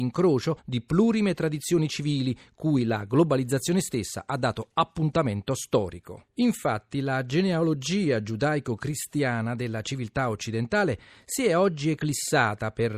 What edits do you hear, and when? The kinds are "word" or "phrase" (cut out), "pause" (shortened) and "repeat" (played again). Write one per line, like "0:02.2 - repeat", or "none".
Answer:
none